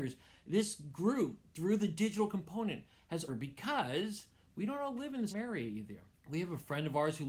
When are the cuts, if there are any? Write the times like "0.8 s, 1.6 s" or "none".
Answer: 3.3 s, 5.3 s, 6.1 s